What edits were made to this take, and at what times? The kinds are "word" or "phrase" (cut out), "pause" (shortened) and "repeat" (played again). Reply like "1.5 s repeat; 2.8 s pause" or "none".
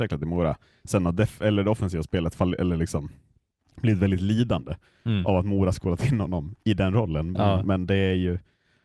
none